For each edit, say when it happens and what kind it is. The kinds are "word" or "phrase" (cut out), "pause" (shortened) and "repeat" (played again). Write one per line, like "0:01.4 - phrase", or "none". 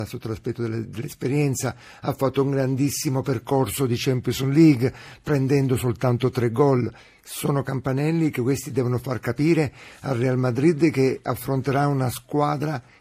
none